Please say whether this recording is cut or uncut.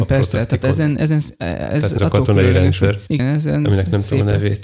cut